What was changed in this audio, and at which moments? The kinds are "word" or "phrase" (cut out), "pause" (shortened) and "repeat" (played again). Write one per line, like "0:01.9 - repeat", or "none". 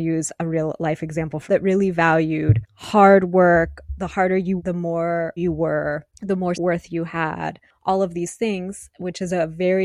0:01.5 - word
0:04.6 - word
0:05.4 - word
0:06.5 - word